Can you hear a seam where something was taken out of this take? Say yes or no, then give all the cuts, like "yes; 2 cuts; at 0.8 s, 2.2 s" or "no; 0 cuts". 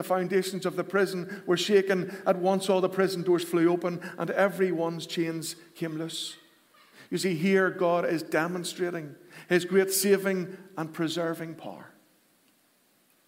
no; 0 cuts